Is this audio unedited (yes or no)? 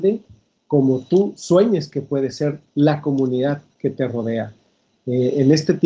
yes